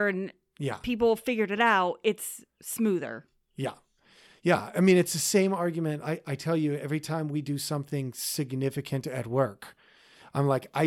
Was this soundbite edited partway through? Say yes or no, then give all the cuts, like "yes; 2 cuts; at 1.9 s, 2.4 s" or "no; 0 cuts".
no; 0 cuts